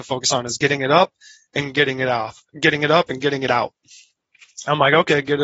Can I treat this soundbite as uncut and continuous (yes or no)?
yes